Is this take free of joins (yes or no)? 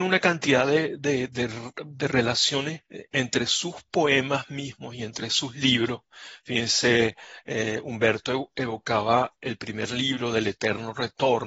no